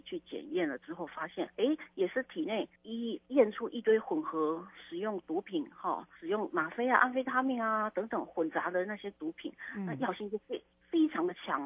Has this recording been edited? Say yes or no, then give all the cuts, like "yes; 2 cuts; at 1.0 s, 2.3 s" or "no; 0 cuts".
yes; 2 cuts; at 2.8 s, 6.2 s